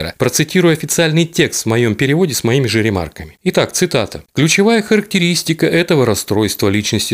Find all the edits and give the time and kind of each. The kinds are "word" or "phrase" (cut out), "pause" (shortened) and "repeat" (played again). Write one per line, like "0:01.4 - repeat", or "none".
none